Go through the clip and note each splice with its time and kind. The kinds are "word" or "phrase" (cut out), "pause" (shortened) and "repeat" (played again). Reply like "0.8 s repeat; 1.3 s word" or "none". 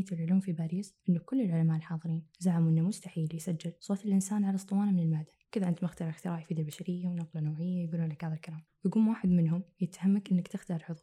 1.0 s pause; 2.3 s pause; 3.8 s pause; 5.4 s pause; 8.7 s pause